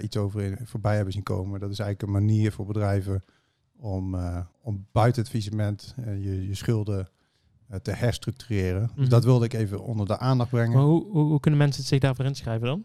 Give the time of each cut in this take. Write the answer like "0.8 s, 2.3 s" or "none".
4.5 s